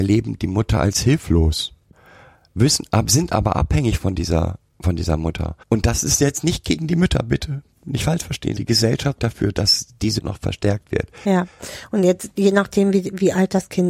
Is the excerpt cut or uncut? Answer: cut